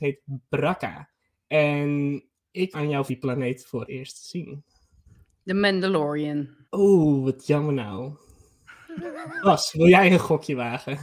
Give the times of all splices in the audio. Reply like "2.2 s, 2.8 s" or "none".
1.2 s, 2.7 s, 3.1 s, 3.9 s, 5.1 s, 6.6 s